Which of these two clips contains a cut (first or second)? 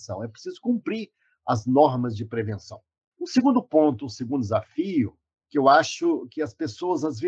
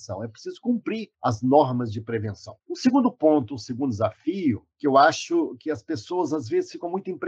second